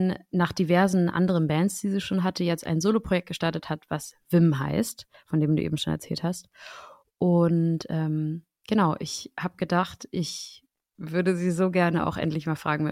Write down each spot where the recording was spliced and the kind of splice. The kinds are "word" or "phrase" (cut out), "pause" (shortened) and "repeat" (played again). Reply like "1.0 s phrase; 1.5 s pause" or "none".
none